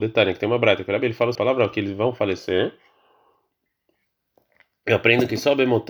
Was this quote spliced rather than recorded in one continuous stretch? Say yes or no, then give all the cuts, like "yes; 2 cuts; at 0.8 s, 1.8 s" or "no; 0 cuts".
yes; 1 cut; at 1.3 s